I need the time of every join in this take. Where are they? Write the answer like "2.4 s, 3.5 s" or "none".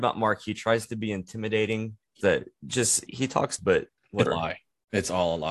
2.2 s, 3.1 s, 3.6 s, 4.3 s